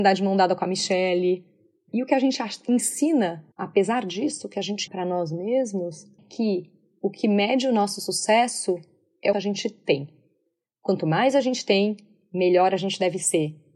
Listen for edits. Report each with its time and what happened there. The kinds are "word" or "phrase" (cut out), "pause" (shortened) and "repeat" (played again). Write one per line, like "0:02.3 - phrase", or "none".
0:03.5 - pause
0:04.9 - word
0:06.2 - word
0:09.3 - phrase